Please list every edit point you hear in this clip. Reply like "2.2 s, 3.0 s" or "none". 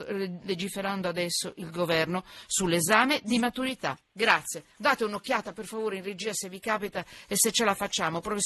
4.7 s